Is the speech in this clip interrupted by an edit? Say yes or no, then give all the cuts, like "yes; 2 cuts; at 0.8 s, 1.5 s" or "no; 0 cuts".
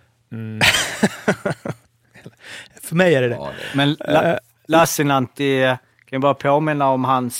no; 0 cuts